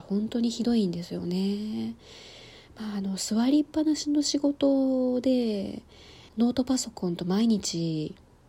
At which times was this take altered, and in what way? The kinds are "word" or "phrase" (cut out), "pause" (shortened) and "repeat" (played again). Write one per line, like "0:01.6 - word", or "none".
0:06.3 - pause